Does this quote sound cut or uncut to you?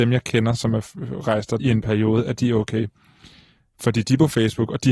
cut